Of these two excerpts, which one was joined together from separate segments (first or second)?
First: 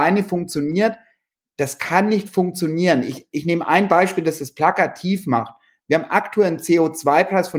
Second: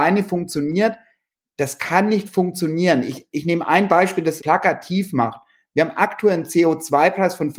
second